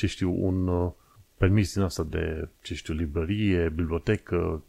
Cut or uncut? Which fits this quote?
uncut